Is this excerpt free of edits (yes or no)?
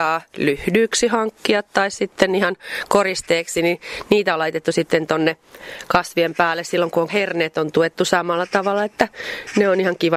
no